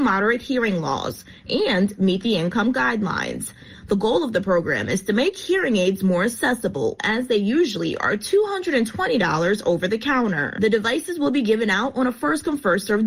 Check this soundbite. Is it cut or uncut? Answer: uncut